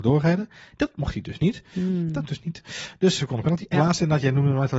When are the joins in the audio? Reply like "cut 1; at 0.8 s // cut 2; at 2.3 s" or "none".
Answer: cut 1; at 2.3 s // cut 2; at 3.2 s // cut 3; at 3.7 s